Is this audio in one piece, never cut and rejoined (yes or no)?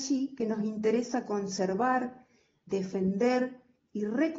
yes